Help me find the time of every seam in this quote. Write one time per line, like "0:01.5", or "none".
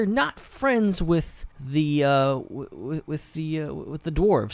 0:01.5